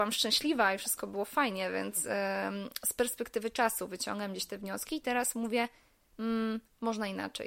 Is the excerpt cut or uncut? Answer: uncut